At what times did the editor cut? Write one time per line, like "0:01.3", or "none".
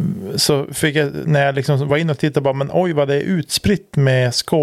none